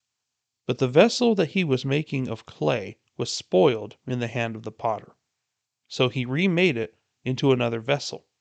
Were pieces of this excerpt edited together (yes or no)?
no